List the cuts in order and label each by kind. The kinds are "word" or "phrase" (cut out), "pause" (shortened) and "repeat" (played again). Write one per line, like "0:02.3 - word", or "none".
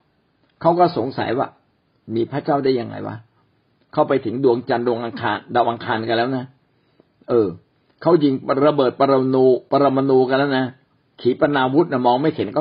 none